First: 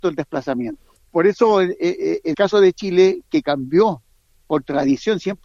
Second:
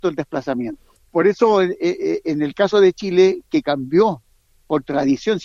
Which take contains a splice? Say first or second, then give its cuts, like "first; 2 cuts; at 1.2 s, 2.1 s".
first; 1 cut; at 2.3 s